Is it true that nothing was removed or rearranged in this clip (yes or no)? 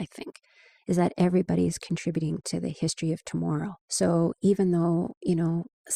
yes